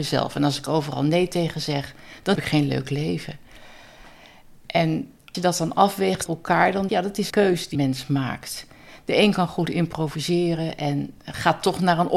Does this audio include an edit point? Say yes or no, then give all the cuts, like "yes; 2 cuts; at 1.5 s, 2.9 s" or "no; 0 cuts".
yes; 6 cuts; at 2.4 s, 5.3 s, 6.3 s, 6.9 s, 7.3 s, 7.7 s